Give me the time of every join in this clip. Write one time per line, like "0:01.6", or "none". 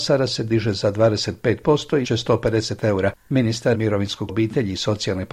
0:02.0
0:03.7
0:04.3